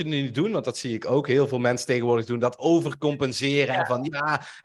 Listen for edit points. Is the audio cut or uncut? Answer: uncut